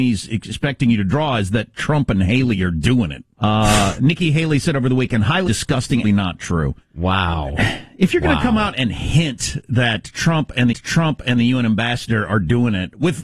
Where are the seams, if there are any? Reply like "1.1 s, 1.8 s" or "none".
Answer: 3.3 s, 5.5 s, 6.0 s, 6.8 s, 10.7 s